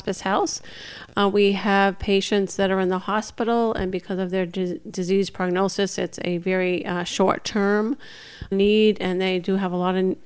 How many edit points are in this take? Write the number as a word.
one